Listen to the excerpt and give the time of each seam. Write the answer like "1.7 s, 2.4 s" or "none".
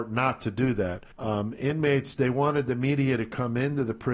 1.1 s

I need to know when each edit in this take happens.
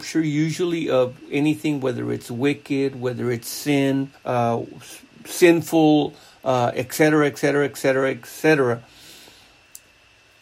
4.1 s

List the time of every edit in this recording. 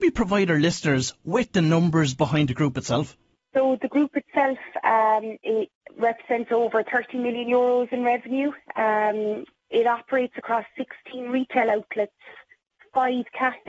none

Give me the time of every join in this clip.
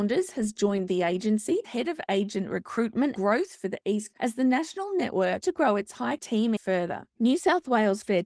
1.6 s, 3.2 s, 4.1 s, 5.4 s, 6.2 s, 6.6 s

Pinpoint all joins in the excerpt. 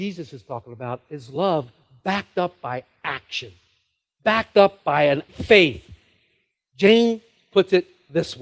5.3 s

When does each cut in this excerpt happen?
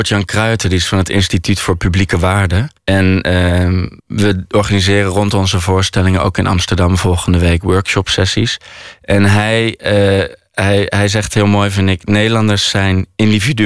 2.8 s, 4.0 s

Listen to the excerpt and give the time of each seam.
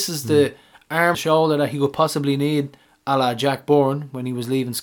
1.1 s

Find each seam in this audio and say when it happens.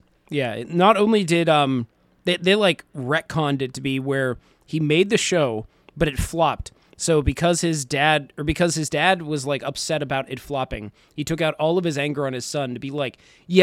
none

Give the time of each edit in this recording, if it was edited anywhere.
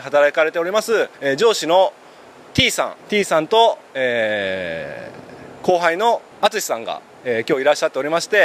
1.1 s, 3.0 s, 6.3 s

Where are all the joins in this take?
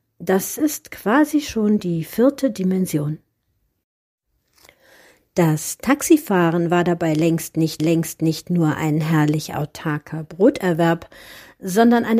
7.8 s

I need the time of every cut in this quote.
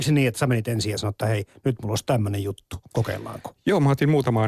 none

